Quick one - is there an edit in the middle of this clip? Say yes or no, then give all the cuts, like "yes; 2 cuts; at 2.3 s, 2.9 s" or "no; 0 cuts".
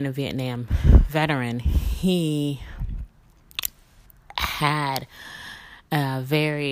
no; 0 cuts